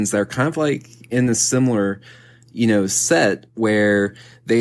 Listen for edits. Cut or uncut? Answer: uncut